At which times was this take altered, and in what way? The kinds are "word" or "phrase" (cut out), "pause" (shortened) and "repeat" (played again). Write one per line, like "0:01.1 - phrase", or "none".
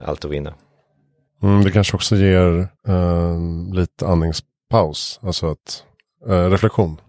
0:02.8 - pause